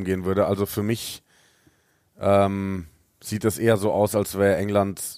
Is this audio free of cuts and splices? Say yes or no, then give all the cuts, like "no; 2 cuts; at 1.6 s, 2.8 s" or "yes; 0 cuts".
yes; 0 cuts